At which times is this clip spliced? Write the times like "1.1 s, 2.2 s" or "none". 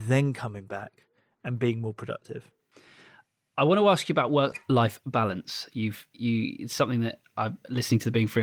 none